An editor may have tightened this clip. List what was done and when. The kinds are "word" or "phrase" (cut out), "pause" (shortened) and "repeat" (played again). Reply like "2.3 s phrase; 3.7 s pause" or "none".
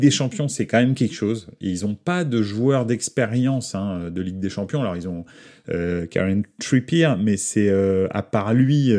none